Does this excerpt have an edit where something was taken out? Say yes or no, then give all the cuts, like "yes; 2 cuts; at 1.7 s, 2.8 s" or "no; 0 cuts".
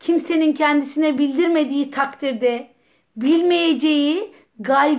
no; 0 cuts